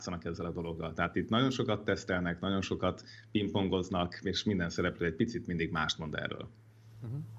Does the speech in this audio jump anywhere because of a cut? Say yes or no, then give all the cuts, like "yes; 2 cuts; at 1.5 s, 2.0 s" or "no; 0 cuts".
no; 0 cuts